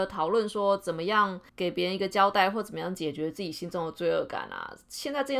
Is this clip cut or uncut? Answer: cut